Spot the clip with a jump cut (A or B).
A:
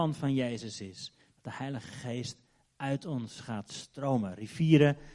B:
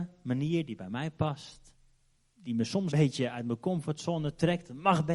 B